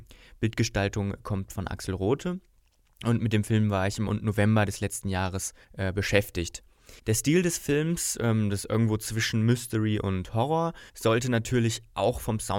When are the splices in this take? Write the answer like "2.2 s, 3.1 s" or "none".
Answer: 4.1 s, 5.6 s, 7.0 s, 10.9 s